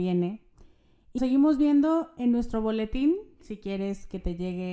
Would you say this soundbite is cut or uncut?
cut